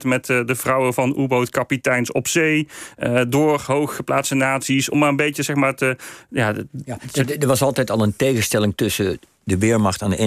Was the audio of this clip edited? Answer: no; 0 cuts

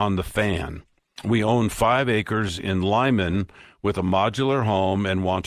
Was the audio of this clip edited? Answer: no; 0 cuts

